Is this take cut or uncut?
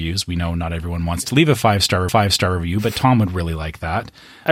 cut